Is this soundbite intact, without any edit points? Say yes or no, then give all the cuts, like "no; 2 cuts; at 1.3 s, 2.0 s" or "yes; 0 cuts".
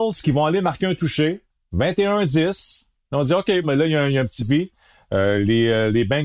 no; 2 cuts; at 3.6 s, 4.4 s